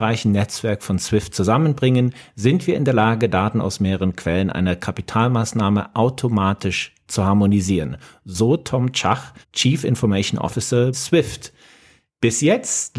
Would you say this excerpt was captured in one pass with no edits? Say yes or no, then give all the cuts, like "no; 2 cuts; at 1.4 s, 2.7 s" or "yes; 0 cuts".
no; 2 cuts; at 9.4 s, 10.9 s